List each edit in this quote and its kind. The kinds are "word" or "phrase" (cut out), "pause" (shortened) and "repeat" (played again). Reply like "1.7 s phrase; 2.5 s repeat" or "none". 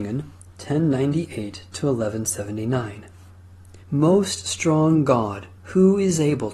3.8 s pause; 5.6 s pause